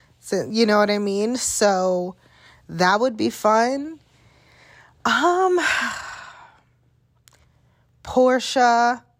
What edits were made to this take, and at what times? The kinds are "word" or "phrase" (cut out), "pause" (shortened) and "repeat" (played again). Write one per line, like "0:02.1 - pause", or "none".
none